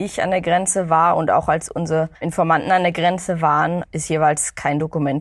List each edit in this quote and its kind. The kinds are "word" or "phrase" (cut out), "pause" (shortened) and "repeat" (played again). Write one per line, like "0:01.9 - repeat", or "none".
0:02.1 - pause